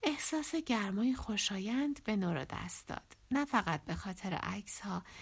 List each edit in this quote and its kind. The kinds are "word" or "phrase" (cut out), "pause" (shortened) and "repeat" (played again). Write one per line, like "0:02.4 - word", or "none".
none